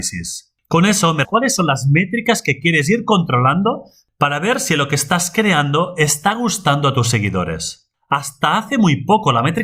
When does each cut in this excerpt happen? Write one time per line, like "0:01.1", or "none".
0:01.2